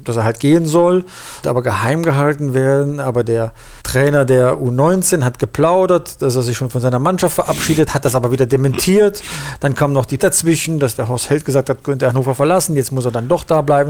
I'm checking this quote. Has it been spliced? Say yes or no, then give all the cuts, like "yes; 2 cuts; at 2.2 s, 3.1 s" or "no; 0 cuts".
yes; 5 cuts; at 1.4 s, 3.8 s, 7.9 s, 10.2 s, 11.8 s